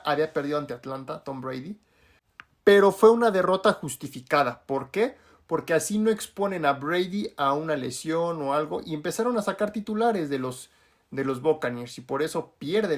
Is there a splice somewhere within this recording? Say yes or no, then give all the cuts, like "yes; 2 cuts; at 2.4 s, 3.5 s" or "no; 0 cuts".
no; 0 cuts